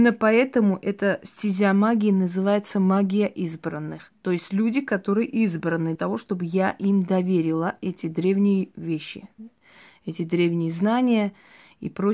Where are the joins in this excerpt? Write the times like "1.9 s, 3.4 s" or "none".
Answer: 5.9 s